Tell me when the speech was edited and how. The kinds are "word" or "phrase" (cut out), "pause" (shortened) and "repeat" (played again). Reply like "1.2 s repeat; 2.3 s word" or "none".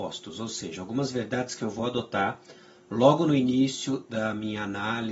none